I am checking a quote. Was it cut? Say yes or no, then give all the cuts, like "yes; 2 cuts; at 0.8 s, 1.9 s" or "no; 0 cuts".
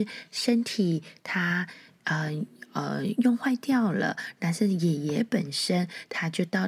no; 0 cuts